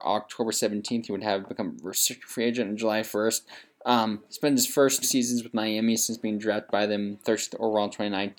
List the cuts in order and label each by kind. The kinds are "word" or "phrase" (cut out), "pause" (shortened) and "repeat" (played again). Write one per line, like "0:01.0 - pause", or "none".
0:05.0 - word